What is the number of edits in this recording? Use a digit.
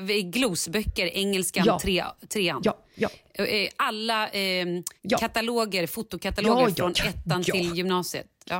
2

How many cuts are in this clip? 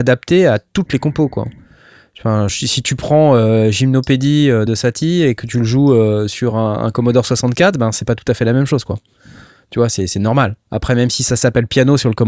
0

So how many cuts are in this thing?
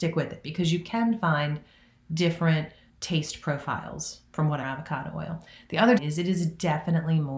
3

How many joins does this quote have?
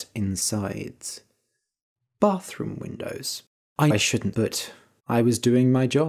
3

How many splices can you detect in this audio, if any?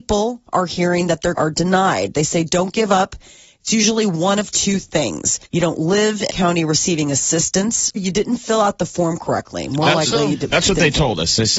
4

